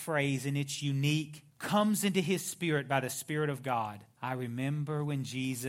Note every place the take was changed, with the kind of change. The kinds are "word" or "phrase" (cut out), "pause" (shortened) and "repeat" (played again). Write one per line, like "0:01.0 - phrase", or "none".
0:01.5 - pause
0:04.1 - pause